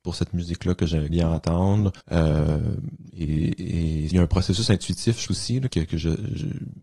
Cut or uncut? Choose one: cut